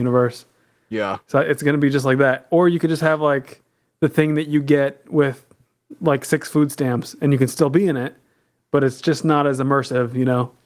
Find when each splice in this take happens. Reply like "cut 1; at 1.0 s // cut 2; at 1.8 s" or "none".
none